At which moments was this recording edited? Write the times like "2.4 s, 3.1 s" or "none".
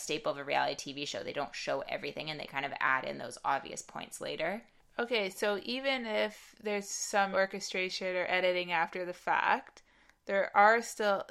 4.8 s, 7.3 s